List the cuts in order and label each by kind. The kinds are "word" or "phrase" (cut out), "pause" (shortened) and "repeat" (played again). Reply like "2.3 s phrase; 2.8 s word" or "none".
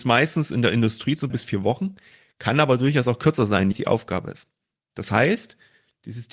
1.3 s phrase; 3.7 s phrase